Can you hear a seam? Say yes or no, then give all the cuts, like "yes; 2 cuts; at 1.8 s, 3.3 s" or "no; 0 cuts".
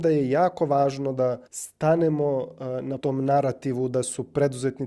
yes; 2 cuts; at 1.5 s, 3.0 s